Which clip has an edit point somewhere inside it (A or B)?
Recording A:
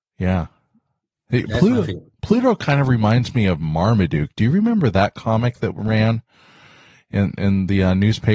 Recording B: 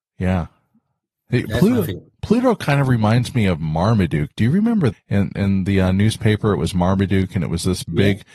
B